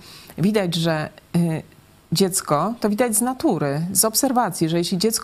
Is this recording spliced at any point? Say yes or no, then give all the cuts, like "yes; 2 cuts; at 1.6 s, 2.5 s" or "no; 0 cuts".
no; 0 cuts